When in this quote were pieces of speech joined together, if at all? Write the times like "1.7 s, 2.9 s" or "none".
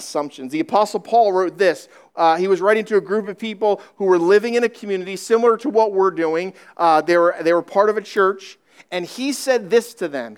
none